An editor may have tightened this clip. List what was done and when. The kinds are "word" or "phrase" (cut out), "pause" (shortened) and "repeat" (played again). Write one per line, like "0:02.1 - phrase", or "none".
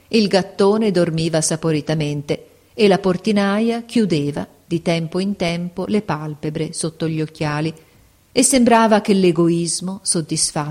none